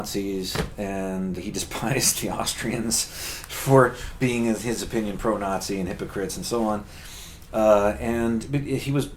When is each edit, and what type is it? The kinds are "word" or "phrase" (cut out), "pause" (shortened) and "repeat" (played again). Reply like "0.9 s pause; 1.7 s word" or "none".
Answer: 1.4 s word